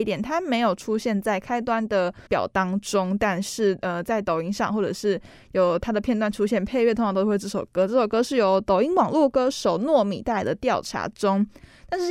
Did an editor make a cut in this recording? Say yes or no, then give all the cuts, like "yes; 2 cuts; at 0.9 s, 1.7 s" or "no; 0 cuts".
yes; 1 cut; at 2.3 s